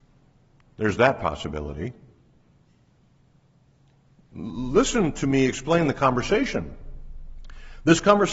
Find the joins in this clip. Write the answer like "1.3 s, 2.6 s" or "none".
none